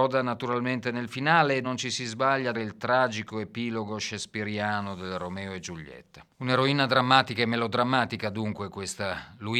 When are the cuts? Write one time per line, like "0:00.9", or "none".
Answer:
0:01.6
0:02.5
0:06.3